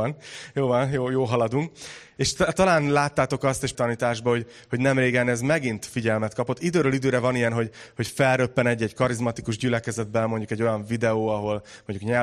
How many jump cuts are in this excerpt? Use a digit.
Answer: 1